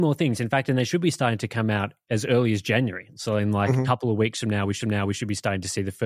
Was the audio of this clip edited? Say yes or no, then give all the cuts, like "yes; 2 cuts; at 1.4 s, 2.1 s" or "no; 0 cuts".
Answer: yes; 1 cut; at 4.8 s